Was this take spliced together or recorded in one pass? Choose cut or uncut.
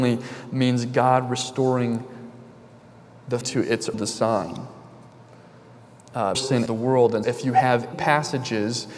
cut